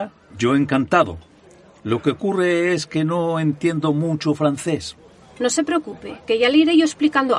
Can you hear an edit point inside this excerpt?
no; 0 cuts

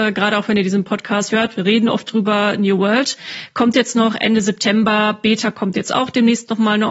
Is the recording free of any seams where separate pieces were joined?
no; 1 cut; at 1.3 s

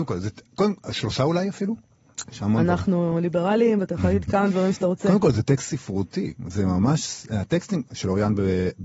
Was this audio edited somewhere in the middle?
yes; 1 cut; at 6.4 s

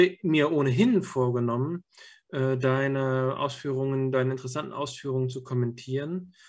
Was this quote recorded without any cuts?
yes; 0 cuts

